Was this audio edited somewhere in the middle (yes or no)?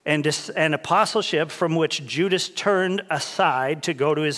no